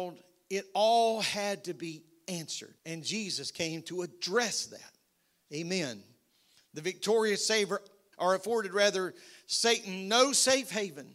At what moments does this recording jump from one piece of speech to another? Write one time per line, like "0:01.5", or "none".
0:02.8
0:08.1